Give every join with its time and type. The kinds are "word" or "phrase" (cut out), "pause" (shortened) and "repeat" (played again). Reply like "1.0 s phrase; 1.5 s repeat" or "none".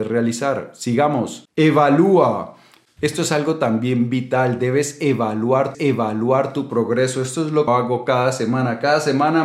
5.7 s repeat; 7.7 s phrase